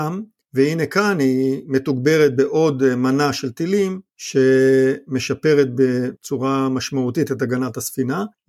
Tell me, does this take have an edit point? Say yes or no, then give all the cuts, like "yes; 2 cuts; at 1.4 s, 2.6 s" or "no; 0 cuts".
no; 0 cuts